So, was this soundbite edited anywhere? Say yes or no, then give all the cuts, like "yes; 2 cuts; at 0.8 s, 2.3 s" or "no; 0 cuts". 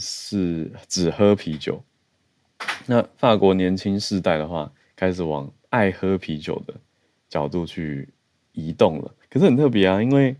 yes; 1 cut; at 9.2 s